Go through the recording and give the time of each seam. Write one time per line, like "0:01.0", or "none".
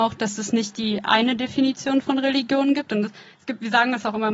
none